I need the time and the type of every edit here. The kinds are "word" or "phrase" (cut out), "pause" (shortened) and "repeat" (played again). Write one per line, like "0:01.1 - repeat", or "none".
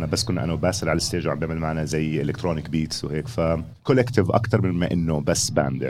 0:03.8 - pause